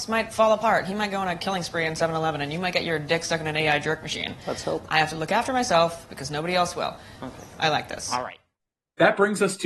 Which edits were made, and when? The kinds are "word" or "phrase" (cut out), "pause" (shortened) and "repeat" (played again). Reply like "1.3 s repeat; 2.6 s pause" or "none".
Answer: none

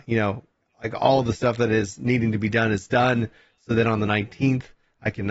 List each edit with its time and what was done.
none

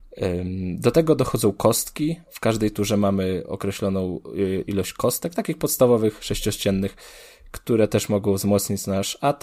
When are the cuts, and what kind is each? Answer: none

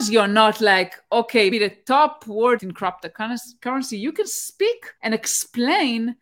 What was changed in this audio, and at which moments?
1.5 s word; 2.6 s word; 5.0 s pause

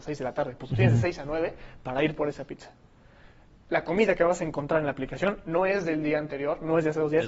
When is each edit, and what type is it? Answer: none

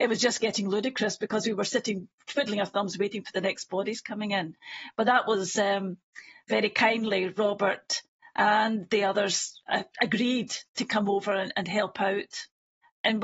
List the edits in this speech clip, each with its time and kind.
none

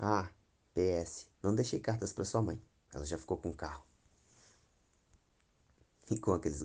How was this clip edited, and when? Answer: 1.3 s pause

